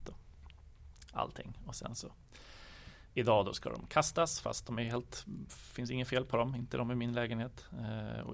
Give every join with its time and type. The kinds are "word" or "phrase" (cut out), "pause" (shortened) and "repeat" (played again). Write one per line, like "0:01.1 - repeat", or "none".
none